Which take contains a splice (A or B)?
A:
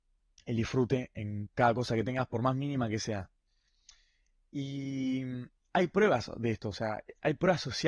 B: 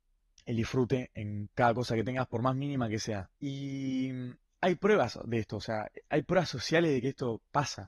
B